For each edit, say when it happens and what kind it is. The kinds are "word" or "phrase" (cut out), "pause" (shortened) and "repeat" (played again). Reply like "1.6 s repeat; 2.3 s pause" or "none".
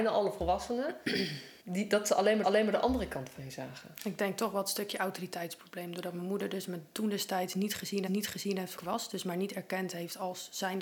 1.6 s pause; 2.4 s repeat; 8.1 s repeat; 8.8 s phrase